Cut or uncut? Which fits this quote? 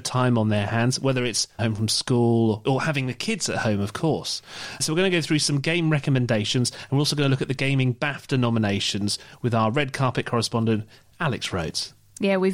cut